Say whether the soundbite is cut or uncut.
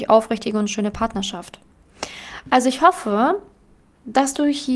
uncut